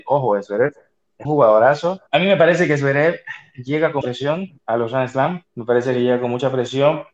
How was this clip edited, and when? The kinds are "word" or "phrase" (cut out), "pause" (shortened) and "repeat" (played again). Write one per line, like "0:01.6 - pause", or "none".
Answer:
0:01.2 - word
0:02.1 - pause
0:04.0 - word
0:04.6 - pause
0:05.5 - pause